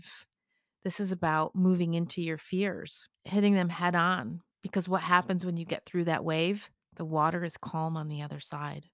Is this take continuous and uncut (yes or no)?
no